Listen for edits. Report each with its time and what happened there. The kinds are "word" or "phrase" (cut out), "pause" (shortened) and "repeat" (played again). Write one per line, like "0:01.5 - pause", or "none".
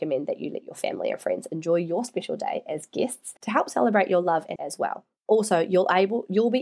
0:03.4 - pause
0:04.6 - phrase